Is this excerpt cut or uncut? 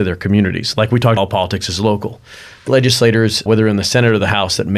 cut